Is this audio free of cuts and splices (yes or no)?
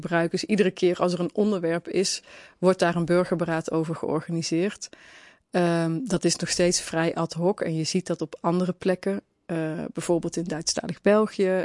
yes